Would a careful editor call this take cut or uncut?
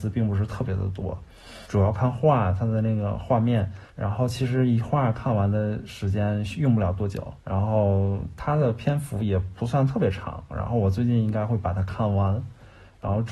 cut